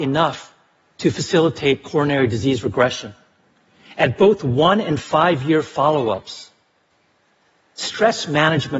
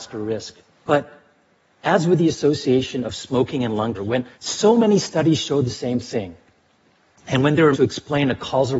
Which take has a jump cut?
second; 3 cuts; at 3.9 s, 4.3 s, 7.7 s

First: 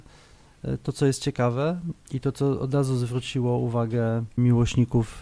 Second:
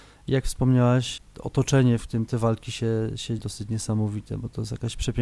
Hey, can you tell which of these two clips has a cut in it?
second; 1 cut; at 3.4 s

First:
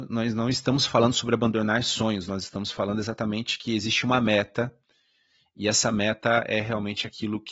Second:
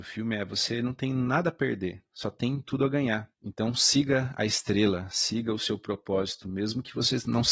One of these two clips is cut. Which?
second; 1 cut; at 3.3 s

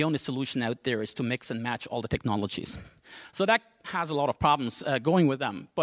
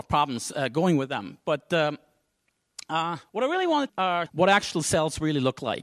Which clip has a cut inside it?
second; 3 cuts; at 3.3 s, 3.9 s, 4.3 s

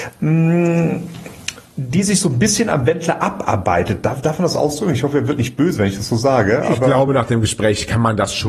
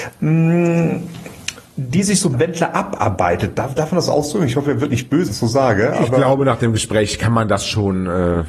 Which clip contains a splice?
second; 2 cuts; at 2.3 s, 5.3 s

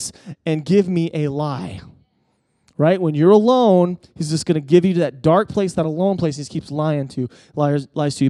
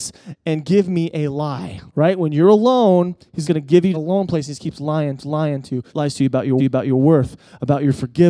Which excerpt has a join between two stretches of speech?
second; 6 cuts; at 1.9 s, 3.4 s, 3.9 s, 5.2 s, 5.9 s, 6.6 s

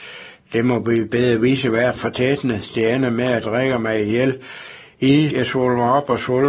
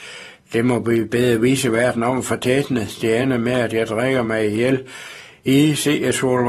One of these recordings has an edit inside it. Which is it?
first; 3 cuts; at 2.0 s, 3.4 s, 5.3 s

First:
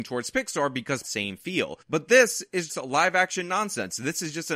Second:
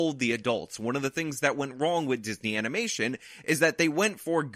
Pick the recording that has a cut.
first; 3 cuts; at 1.0 s, 1.8 s, 2.7 s

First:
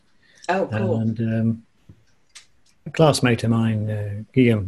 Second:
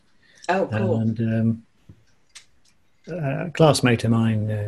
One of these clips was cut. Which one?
first; 1 cut; at 2.9 s

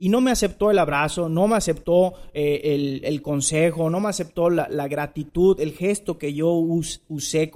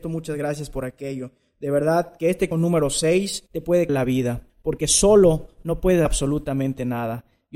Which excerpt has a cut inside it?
second; 5 cuts; at 2.5 s, 3.5 s, 3.9 s, 4.5 s, 6.1 s

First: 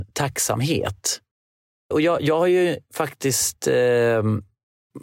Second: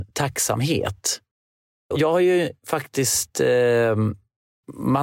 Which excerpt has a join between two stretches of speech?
second; 1 cut; at 1.9 s

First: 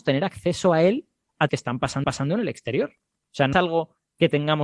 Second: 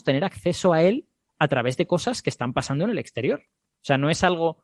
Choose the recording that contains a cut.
first; 3 cuts; at 1.5 s, 2.0 s, 3.5 s

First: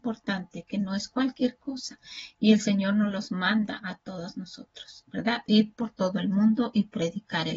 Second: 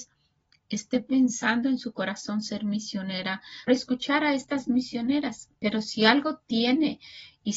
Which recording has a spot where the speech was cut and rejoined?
second; 1 cut; at 3.7 s

